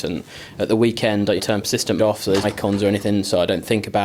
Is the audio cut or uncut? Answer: cut